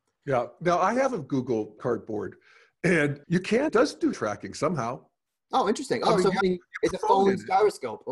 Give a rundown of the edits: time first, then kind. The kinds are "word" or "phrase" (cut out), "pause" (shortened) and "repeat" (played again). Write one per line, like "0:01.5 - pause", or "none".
0:01.8 - word
0:03.2 - word
0:03.7 - word
0:04.1 - word
0:06.4 - word
0:06.9 - word